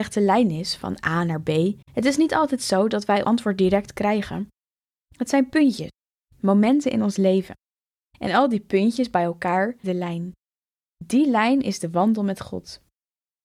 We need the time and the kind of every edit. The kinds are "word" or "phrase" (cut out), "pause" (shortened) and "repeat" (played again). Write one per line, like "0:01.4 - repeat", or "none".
0:01.8 - pause
0:03.2 - word
0:09.8 - word